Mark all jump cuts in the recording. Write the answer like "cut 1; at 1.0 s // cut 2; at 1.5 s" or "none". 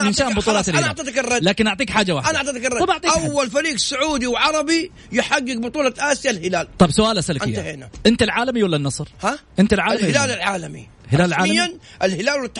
cut 1; at 9.1 s